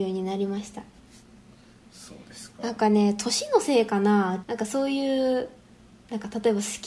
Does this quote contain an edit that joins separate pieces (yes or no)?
yes